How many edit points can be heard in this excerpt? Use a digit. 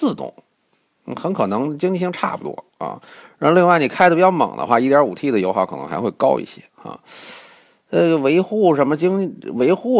2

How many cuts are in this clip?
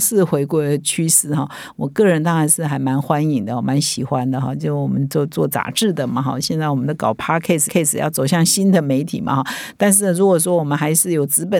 1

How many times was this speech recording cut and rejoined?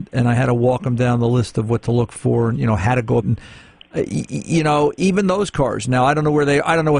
1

